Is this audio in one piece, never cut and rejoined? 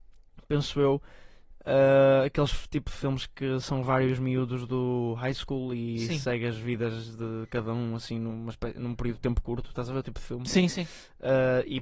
yes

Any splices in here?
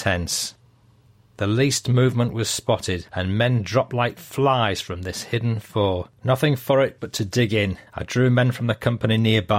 yes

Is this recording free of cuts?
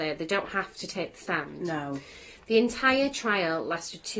yes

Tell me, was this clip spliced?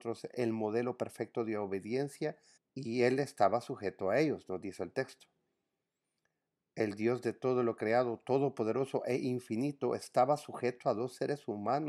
yes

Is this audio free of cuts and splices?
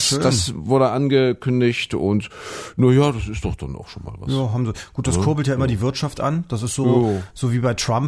yes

